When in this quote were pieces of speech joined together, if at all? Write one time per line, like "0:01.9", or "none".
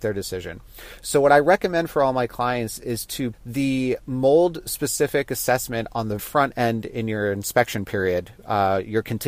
0:03.3
0:06.2